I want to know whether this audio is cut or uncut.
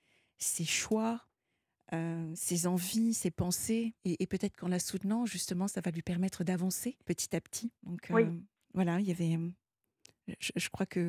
cut